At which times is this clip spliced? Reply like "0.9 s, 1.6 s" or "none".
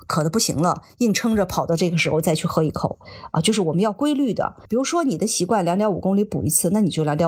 4.6 s